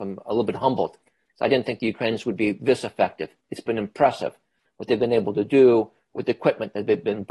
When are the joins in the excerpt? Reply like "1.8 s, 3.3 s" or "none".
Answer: none